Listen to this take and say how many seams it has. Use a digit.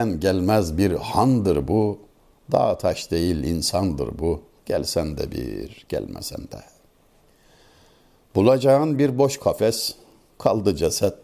0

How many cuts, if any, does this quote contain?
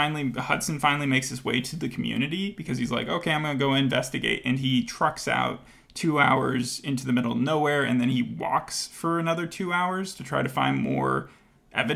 0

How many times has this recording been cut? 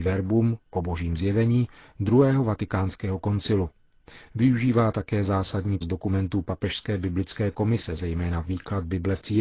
1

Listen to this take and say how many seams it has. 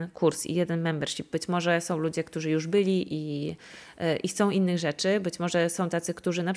0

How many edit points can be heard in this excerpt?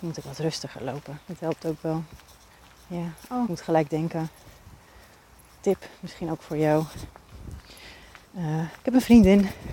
4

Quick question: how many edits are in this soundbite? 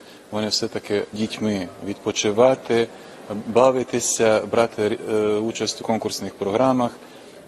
2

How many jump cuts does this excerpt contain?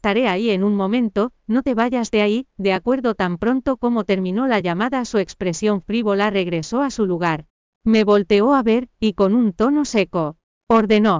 0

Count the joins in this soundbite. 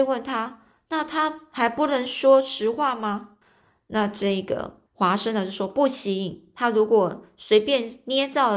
2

